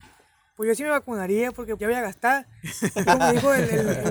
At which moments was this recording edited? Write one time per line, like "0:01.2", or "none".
0:01.8
0:03.0